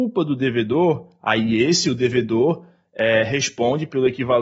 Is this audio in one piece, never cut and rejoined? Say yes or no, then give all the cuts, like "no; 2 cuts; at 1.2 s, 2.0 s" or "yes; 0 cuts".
yes; 0 cuts